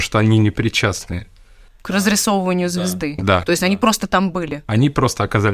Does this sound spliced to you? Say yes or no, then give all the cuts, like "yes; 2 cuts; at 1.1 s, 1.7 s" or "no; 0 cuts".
no; 0 cuts